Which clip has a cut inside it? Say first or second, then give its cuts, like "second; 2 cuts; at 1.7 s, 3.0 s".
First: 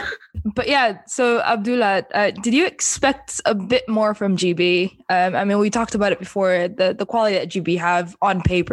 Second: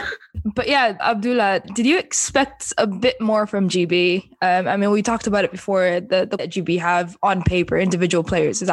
second; 3 cuts; at 1.0 s, 1.6 s, 6.4 s